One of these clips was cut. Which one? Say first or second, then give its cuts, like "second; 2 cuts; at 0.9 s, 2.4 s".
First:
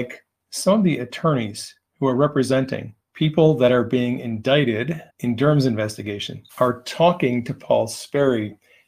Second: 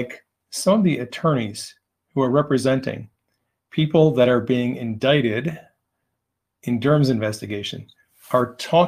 first; 4 cuts; at 1.9 s, 3.0 s, 5.1 s, 6.5 s